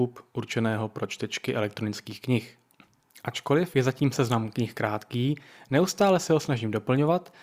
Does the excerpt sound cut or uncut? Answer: uncut